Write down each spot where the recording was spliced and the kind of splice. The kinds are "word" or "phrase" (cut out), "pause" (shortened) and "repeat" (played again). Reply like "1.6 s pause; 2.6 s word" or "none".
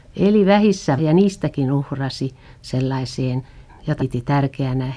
1.0 s word; 3.7 s word; 4.0 s word